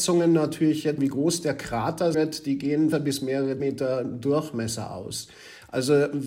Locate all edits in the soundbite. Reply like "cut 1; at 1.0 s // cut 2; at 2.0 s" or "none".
cut 1; at 1.0 s // cut 2; at 2.1 s // cut 3; at 2.9 s // cut 4; at 3.6 s